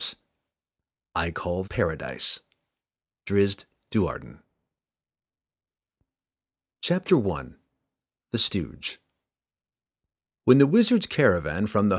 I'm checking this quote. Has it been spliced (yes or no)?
yes